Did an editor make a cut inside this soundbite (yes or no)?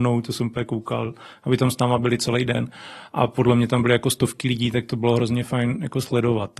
no